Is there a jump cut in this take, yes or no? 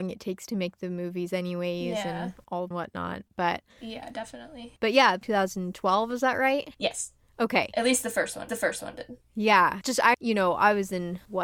yes